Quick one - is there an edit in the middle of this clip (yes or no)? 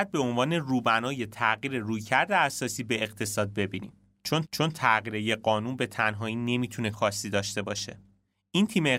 yes